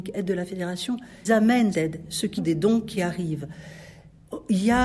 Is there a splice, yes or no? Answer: yes